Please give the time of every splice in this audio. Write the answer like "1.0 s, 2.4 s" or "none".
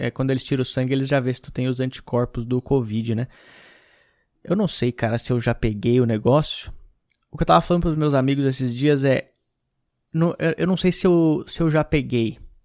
none